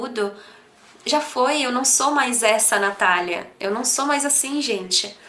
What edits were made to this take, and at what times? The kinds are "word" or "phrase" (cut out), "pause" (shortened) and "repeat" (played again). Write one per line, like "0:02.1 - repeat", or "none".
none